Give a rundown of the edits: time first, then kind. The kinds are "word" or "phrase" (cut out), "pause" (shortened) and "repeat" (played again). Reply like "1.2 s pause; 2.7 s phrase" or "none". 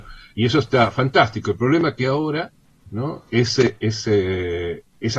none